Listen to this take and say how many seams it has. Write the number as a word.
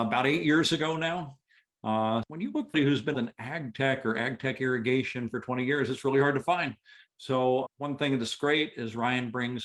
four